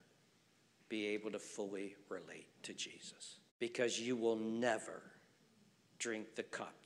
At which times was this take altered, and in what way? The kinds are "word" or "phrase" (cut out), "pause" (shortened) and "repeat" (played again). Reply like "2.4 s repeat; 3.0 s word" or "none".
3.5 s pause